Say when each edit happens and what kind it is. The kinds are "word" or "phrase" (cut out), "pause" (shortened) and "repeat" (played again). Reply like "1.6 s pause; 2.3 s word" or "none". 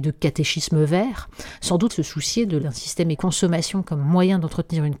1.9 s word; 2.6 s word; 3.1 s phrase